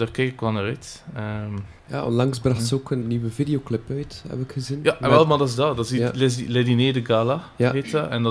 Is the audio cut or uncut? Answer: cut